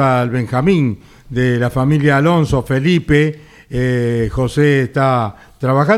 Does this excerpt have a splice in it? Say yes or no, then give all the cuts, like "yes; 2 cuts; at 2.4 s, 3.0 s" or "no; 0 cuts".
no; 0 cuts